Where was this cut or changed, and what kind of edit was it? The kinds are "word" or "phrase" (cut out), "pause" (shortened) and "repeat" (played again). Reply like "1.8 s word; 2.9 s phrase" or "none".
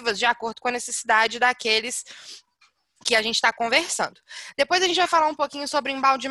none